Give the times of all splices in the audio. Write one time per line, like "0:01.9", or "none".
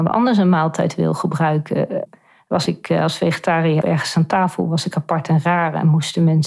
0:02.7
0:03.8

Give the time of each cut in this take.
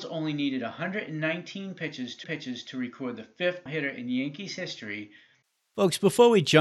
0:02.2
0:03.7
0:05.5

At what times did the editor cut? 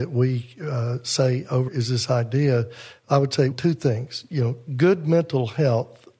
0:01.7
0:03.5

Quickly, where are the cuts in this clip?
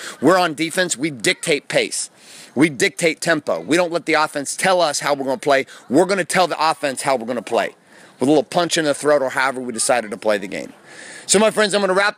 none

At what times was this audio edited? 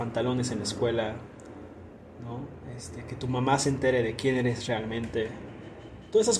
none

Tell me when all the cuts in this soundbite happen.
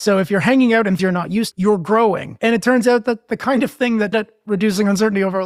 0:01.0
0:01.5
0:04.1

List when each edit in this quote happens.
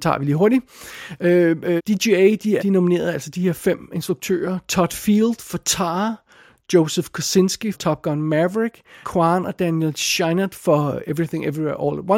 0:01.8
0:02.6
0:07.7
0:09.0

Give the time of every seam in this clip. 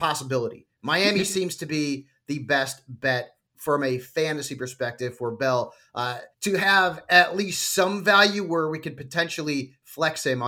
0:06.3

